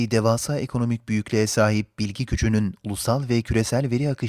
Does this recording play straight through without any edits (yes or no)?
yes